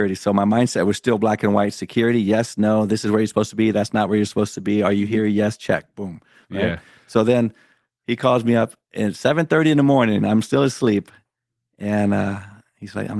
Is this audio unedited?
yes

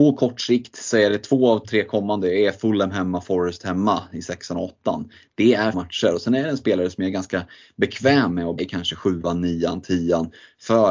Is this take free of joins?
no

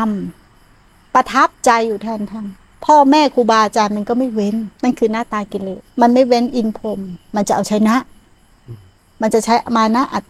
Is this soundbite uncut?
no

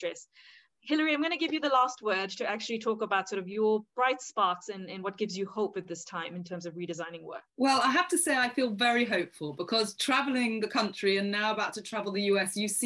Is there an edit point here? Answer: yes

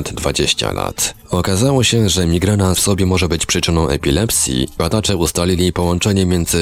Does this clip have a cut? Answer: yes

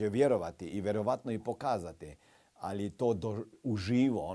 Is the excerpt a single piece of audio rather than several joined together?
yes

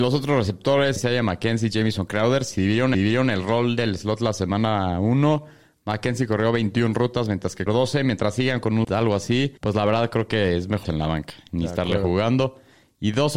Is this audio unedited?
no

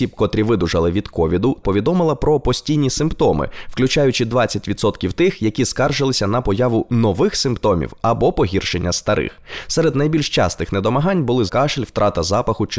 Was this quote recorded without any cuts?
no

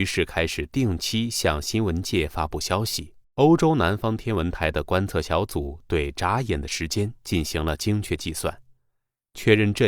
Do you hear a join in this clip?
yes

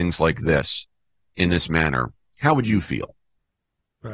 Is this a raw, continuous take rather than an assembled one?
yes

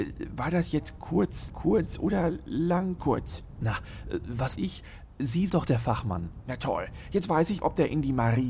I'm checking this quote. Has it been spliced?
yes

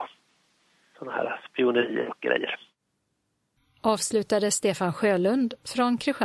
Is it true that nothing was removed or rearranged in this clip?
yes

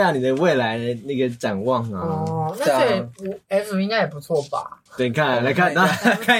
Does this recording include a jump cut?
yes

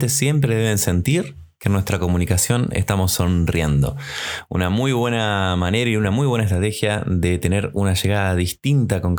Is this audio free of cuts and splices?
yes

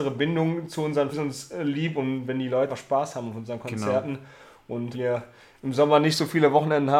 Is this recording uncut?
no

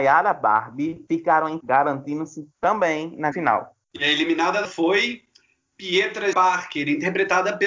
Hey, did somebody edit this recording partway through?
yes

